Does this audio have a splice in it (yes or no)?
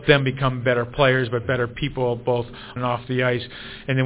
yes